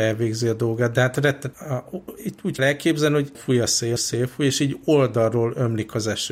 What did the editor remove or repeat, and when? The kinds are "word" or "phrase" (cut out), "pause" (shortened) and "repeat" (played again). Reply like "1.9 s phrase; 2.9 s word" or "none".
1.5 s phrase; 2.6 s word; 3.3 s word; 4.0 s phrase